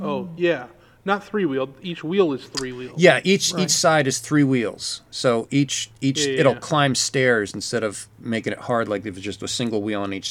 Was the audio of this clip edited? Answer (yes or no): no